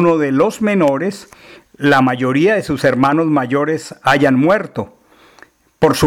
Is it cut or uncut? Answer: uncut